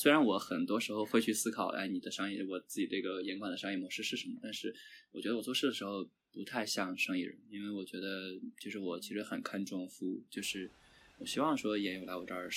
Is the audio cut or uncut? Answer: uncut